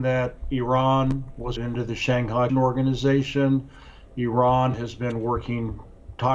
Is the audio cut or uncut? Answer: cut